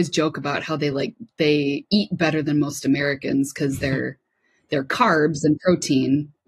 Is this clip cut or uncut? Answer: uncut